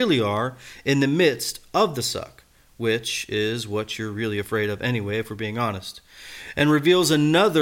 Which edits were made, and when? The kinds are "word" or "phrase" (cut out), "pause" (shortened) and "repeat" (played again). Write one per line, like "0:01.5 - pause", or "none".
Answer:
none